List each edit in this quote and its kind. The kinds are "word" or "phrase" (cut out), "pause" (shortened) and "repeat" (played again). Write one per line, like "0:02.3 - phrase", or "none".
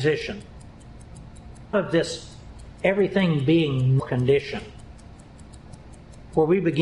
0:01.7 - word
0:04.0 - word